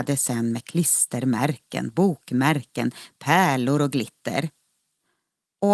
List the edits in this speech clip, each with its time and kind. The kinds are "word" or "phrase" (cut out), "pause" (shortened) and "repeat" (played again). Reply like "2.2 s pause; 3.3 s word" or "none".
none